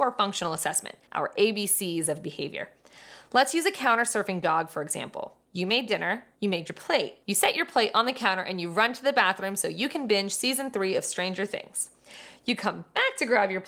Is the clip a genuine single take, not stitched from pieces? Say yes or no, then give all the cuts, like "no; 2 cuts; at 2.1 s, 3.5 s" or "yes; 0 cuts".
no; 4 cuts; at 1.1 s, 5.4 s, 6.3 s, 7.2 s